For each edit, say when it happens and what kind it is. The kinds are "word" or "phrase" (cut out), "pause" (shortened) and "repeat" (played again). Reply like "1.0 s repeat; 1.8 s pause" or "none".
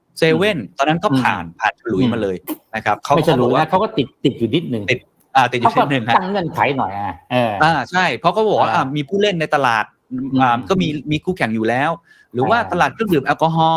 none